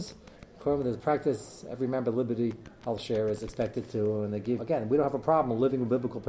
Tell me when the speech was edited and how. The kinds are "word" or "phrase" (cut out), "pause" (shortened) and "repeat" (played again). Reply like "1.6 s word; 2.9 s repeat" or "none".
4.6 s word